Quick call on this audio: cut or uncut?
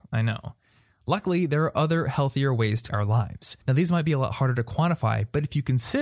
cut